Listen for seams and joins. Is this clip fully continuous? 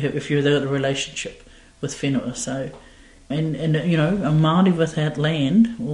no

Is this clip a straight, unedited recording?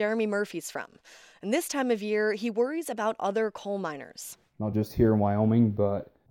yes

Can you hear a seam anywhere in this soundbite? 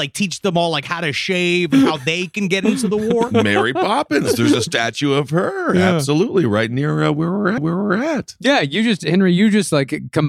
yes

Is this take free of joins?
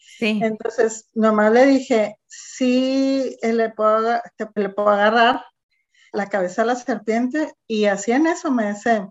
no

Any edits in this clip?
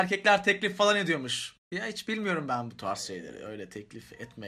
no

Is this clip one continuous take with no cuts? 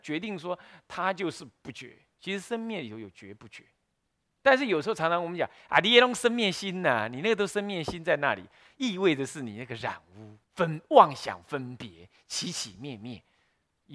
no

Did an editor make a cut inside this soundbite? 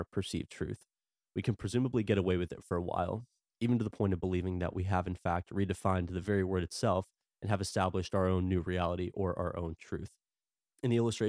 no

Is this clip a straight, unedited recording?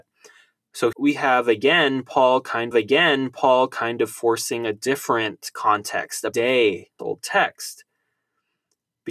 no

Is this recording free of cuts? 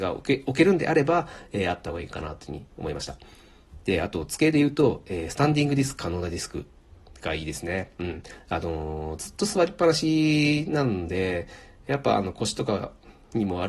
yes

